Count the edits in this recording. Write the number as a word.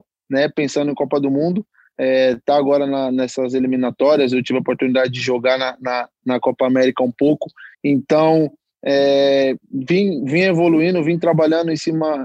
one